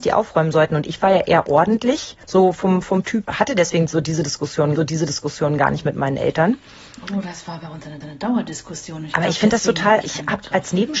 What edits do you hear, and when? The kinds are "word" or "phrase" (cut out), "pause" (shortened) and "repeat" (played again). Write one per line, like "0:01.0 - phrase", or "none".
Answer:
0:02.2 - pause
0:03.2 - phrase
0:04.8 - repeat
0:08.0 - repeat
0:10.0 - word